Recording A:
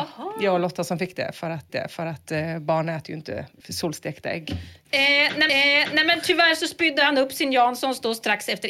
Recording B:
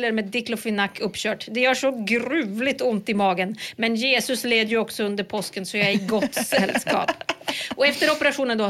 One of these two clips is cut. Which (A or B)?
A